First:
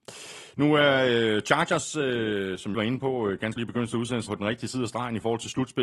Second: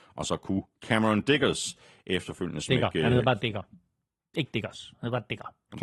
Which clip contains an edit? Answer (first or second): first